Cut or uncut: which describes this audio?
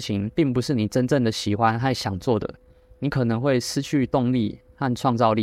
uncut